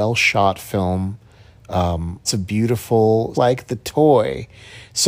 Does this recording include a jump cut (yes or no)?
yes